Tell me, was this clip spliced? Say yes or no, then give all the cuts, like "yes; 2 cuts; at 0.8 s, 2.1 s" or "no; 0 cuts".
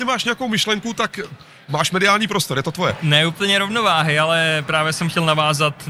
no; 0 cuts